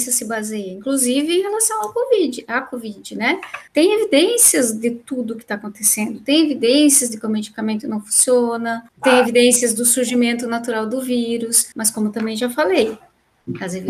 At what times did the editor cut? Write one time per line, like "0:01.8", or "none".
0:03.7
0:11.7